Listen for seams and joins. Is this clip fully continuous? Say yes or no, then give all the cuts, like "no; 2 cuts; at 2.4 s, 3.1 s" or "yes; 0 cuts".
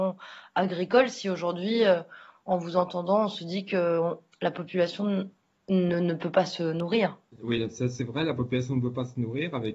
yes; 0 cuts